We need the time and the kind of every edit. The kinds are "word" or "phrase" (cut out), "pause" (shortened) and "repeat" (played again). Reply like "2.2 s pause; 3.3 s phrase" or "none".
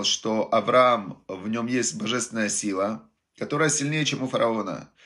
none